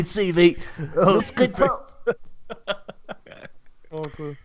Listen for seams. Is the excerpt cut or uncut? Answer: cut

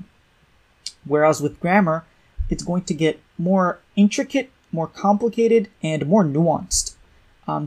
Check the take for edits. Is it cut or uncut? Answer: cut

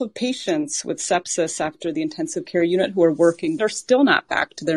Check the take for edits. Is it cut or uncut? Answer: cut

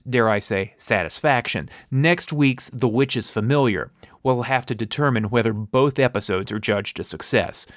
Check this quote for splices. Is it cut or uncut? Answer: uncut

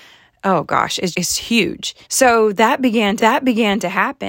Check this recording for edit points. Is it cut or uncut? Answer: cut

